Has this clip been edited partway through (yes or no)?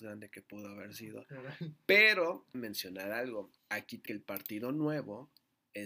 yes